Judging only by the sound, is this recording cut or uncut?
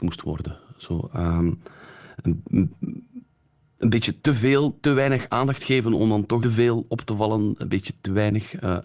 cut